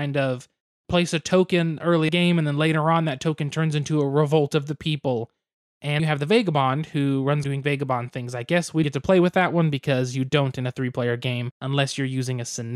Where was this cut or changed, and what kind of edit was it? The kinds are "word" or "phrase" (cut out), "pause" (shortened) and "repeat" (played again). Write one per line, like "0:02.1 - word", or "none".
0:02.1 - phrase
0:06.0 - word
0:07.4 - word
0:08.8 - word
0:11.5 - pause

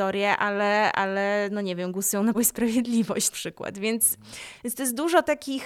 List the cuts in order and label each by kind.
0:02.3 - word
0:03.3 - phrase

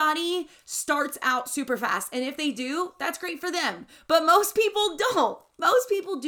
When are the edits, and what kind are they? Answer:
none

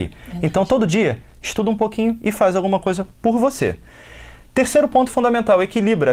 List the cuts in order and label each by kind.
0:01.8 - phrase

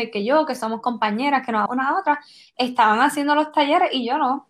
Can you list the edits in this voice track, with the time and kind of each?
0:01.7 - word

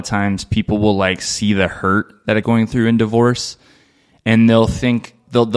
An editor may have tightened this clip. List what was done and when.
0:02.4 - word

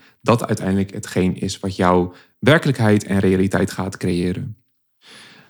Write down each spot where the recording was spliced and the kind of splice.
none

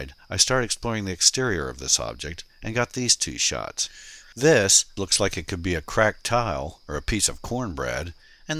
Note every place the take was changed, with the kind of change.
0:05.0 - word

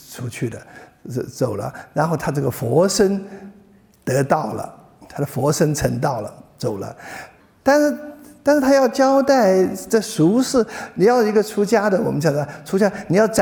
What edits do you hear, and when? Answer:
0:07.4 - pause

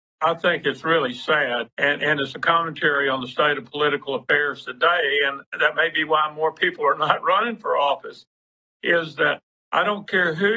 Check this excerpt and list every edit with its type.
0:01.7 - pause

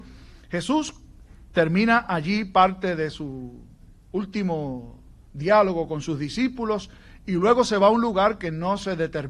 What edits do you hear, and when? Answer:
none

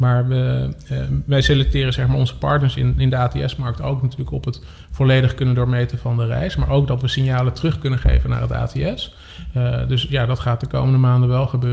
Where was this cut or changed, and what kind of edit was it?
none

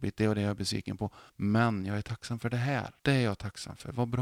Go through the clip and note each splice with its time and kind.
0:01.3 - pause
0:03.0 - pause

